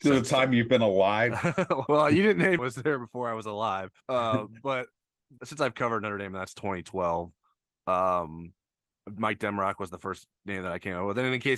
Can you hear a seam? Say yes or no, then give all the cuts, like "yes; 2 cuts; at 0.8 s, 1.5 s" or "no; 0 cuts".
yes; 4 cuts; at 1.9 s, 2.6 s, 4.0 s, 5.4 s